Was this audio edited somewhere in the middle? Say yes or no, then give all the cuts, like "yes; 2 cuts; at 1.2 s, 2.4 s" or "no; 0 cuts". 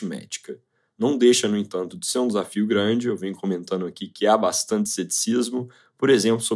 no; 0 cuts